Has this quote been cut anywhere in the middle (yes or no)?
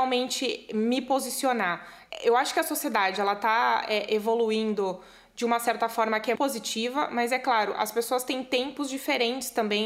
yes